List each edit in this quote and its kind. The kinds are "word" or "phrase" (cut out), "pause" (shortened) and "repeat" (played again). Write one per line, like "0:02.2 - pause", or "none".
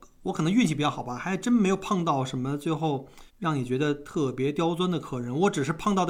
0:03.3 - pause